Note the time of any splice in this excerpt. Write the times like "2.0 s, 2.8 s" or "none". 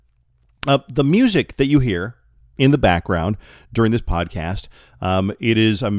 none